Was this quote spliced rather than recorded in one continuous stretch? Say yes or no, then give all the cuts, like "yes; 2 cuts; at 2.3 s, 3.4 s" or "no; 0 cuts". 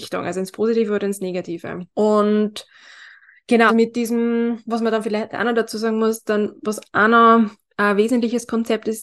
yes; 2 cuts; at 1.9 s, 3.7 s